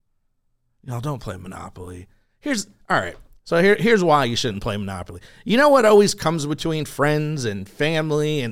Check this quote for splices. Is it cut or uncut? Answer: uncut